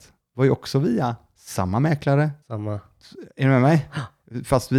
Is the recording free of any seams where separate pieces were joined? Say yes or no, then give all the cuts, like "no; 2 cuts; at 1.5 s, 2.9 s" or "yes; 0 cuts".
no; 1 cut; at 2.4 s